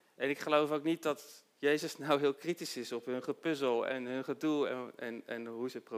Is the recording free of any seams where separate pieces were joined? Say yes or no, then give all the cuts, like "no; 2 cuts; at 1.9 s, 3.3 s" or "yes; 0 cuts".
yes; 0 cuts